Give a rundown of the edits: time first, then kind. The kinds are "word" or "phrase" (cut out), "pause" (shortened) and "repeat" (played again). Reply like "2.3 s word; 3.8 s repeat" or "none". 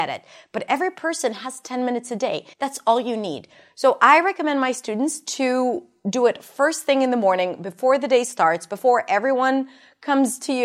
2.5 s pause

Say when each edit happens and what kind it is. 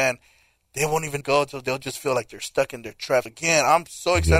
1.2 s phrase; 3.3 s word

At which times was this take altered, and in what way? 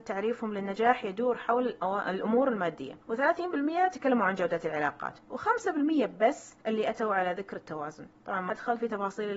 3.0 s pause; 8.5 s word

